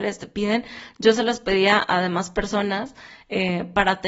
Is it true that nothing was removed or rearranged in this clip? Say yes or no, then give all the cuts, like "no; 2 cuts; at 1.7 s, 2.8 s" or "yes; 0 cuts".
yes; 0 cuts